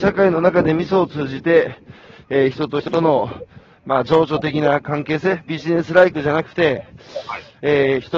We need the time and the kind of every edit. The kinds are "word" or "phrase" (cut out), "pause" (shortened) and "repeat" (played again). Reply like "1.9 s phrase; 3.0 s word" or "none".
none